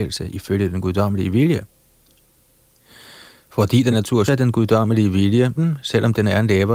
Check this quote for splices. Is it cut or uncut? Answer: cut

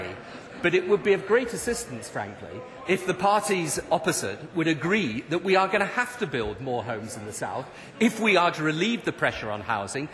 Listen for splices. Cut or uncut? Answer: cut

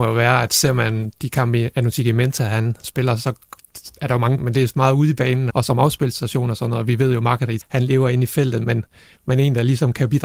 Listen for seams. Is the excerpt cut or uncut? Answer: cut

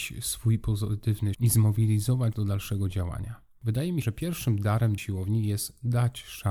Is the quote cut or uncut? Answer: cut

